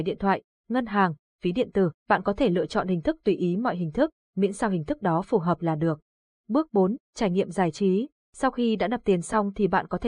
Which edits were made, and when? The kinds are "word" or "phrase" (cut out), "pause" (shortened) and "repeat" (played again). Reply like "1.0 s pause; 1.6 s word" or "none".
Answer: 2.0 s pause